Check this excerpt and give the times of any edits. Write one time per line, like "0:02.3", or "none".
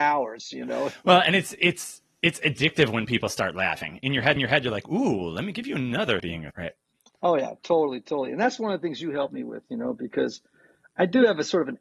0:04.4
0:06.2
0:06.5
0:07.6